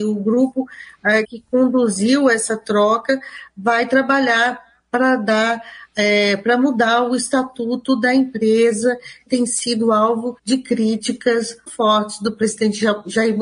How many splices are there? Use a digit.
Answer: 4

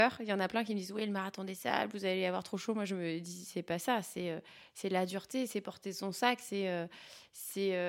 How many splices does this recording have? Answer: 0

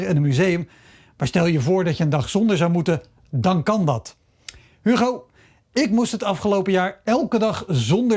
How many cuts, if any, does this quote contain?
0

